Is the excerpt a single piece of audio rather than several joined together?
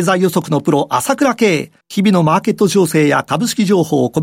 no; 1 cut; at 1.8 s

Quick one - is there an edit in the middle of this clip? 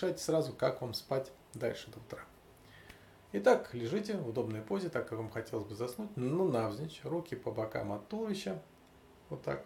no; 0 cuts

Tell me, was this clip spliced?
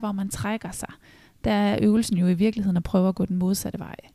no; 0 cuts

